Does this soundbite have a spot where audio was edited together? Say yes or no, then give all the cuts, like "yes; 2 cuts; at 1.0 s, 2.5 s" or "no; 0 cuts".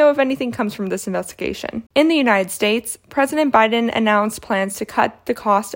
yes; 1 cut; at 1.9 s